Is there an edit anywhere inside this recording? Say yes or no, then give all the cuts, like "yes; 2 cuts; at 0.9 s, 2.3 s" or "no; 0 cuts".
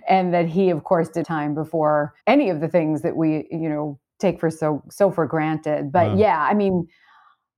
yes; 2 cuts; at 1.2 s, 2.2 s